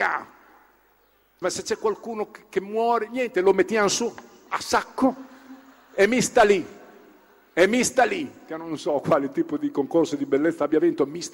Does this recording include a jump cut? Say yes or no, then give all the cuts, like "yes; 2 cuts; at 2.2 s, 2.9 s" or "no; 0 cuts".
yes; 1 cut; at 1.4 s